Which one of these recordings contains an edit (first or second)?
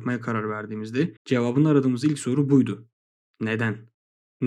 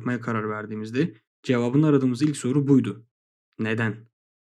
first